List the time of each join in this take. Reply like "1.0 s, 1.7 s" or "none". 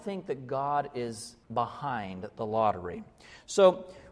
1.4 s